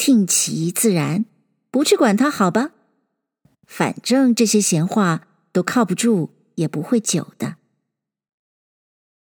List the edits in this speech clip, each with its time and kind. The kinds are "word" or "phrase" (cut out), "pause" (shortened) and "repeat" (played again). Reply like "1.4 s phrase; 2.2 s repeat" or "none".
none

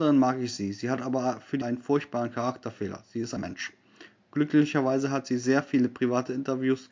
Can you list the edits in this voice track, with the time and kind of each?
1.6 s word; 3.4 s word

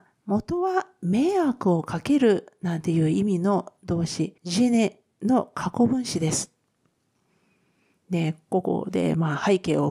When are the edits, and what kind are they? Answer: 4.4 s pause

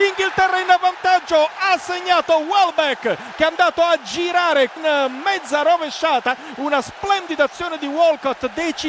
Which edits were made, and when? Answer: 4.8 s word

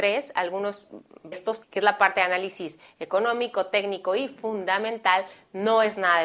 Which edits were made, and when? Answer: 1.3 s phrase; 1.6 s word

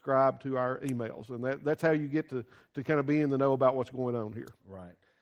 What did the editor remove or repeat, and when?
none

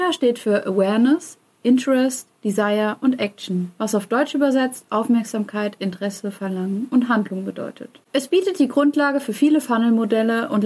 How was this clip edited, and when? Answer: none

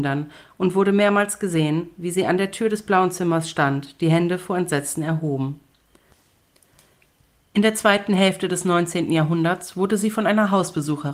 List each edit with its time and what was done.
none

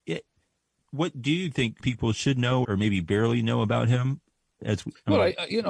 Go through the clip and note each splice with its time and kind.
1.8 s word; 2.6 s word; 4.6 s word

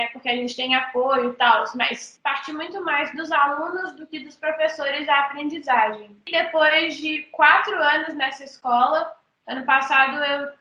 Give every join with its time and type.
none

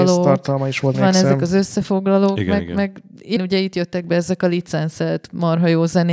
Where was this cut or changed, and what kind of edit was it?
0.9 s phrase; 3.4 s word

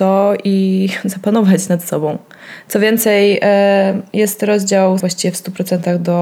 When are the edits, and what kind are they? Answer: 5.0 s word

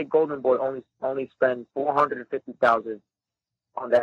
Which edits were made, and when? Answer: 1.7 s pause

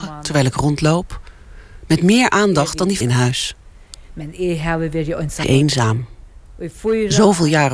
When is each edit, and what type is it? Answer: 3.0 s phrase; 5.4 s word

